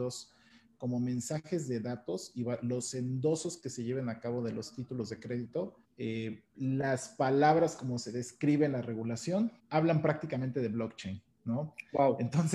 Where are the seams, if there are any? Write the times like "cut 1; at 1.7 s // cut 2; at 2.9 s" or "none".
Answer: cut 1; at 5.8 s // cut 2; at 9.6 s